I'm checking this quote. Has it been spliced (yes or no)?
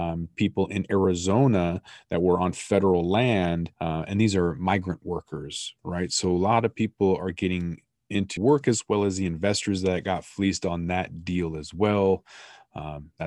yes